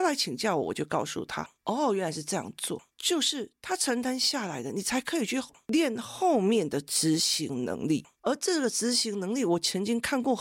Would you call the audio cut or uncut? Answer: uncut